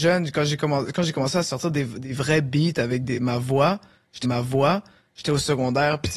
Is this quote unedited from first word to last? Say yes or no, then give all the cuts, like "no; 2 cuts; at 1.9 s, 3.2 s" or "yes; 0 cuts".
no; 1 cut; at 4.2 s